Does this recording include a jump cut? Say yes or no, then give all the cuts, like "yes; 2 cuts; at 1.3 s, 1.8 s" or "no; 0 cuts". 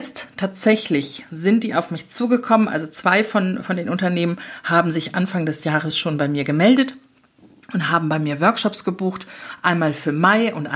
no; 0 cuts